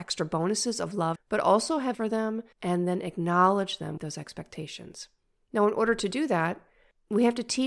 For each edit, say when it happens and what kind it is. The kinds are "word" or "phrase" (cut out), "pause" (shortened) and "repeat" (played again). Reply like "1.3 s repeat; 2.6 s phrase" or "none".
1.2 s phrase; 1.9 s word; 2.5 s pause; 4.0 s phrase